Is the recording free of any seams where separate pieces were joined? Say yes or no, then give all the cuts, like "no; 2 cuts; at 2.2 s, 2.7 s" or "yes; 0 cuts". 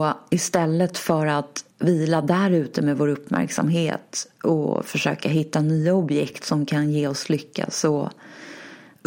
no; 1 cut; at 1.7 s